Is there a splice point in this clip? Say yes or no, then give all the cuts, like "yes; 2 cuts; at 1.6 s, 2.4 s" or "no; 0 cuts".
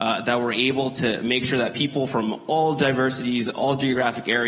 no; 0 cuts